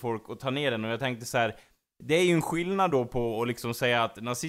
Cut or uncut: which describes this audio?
uncut